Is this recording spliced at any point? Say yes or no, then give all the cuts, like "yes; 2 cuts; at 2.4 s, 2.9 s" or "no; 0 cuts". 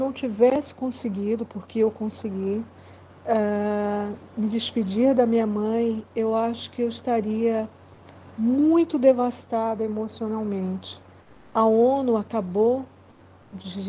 no; 0 cuts